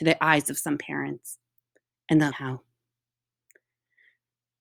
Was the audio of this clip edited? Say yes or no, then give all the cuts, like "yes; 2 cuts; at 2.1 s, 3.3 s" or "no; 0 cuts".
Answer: yes; 1 cut; at 2.3 s